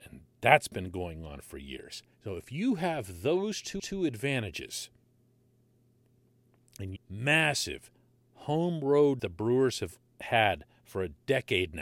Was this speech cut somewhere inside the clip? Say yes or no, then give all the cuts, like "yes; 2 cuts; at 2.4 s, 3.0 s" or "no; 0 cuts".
yes; 4 cuts; at 2.1 s, 3.8 s, 7.0 s, 9.2 s